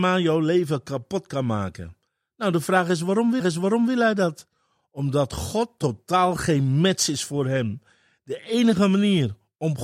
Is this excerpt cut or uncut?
cut